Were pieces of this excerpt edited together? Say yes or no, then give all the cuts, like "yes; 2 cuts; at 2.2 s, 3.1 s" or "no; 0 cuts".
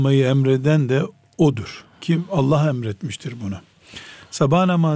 yes; 1 cut; at 1.9 s